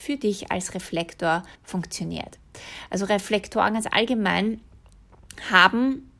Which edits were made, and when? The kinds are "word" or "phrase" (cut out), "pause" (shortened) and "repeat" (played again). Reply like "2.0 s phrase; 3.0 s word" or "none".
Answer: 1.5 s pause